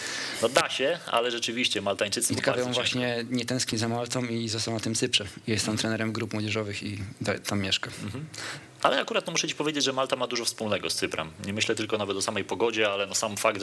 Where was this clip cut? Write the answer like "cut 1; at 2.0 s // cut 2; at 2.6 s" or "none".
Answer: cut 1; at 2.4 s